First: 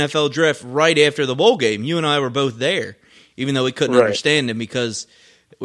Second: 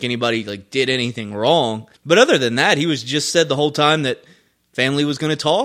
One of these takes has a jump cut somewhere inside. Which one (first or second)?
second